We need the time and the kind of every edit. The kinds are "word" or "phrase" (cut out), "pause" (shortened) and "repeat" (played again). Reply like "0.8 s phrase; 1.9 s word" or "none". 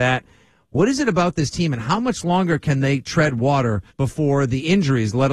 3.9 s pause